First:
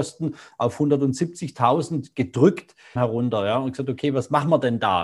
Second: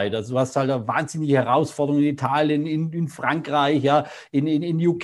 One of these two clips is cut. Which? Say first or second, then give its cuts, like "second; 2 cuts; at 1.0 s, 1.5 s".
first; 1 cut; at 3.0 s